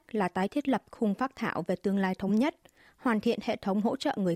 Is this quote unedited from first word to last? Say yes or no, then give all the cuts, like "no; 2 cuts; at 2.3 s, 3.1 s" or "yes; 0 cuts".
yes; 0 cuts